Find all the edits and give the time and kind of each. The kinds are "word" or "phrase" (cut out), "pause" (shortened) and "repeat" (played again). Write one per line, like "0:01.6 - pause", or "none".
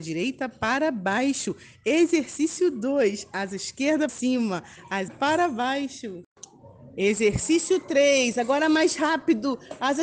0:04.1 - word
0:05.1 - word